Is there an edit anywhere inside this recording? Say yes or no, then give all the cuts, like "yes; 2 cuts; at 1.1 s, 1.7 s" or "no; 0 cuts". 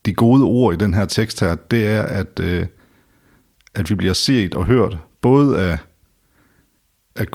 no; 0 cuts